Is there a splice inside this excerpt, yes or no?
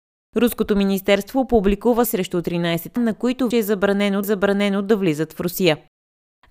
yes